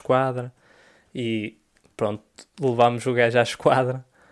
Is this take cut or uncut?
uncut